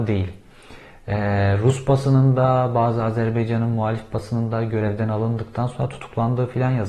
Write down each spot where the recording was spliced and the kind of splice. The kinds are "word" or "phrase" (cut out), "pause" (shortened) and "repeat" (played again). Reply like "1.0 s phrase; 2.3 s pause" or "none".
none